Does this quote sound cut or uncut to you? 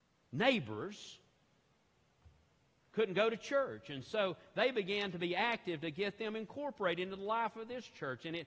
uncut